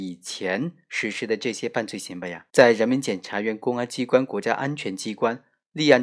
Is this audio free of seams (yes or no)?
no